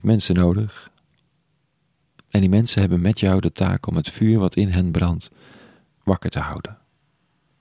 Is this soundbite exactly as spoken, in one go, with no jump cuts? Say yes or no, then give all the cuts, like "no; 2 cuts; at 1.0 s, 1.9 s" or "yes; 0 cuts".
yes; 0 cuts